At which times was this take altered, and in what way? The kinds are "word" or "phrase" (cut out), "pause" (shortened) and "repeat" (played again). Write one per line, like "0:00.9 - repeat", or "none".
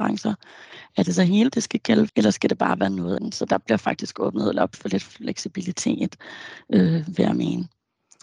0:01.5 - word
0:02.1 - word
0:03.2 - word